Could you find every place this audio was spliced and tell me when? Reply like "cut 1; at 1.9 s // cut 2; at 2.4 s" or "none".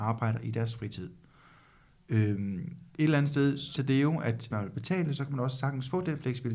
cut 1; at 3.8 s // cut 2; at 4.5 s